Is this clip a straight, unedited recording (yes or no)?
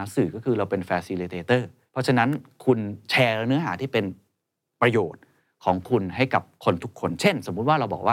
yes